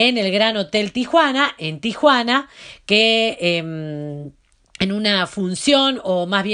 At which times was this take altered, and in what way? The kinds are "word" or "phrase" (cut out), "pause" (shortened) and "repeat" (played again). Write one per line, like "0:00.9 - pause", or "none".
none